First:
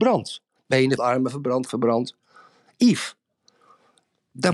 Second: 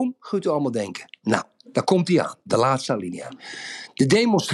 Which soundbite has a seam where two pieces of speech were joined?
first; 2 cuts; at 1.0 s, 1.7 s

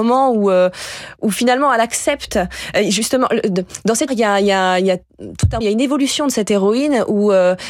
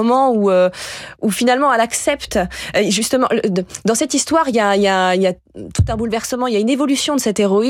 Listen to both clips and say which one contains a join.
first; 2 cuts; at 4.1 s, 5.6 s

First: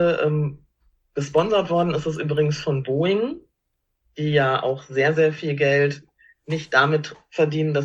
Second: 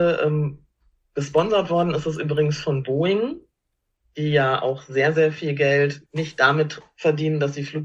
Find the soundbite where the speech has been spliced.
second; 1 cut; at 6.1 s

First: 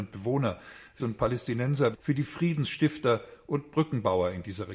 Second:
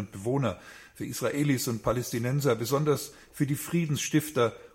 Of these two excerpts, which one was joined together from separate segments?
first; 2 cuts; at 1.0 s, 1.9 s

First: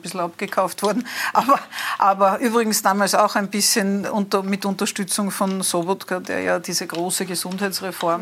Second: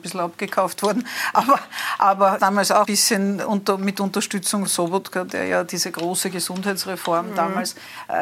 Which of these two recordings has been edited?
second; 3 cuts; at 2.4 s, 2.8 s, 4.7 s

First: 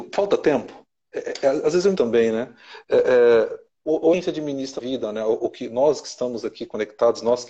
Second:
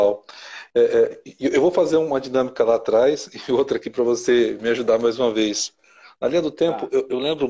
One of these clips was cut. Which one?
first; 4 cuts; at 1.9 s, 3.8 s, 4.1 s, 4.8 s

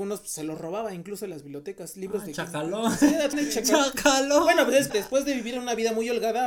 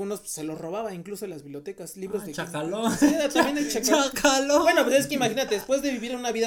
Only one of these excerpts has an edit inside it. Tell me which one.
first; 2 cuts; at 3.3 s, 4.9 s

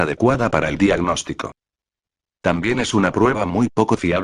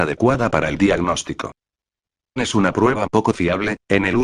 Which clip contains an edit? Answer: second; 2 cuts; at 2.4 s, 3.1 s

